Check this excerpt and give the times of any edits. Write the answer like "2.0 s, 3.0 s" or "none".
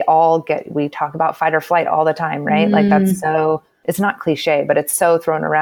none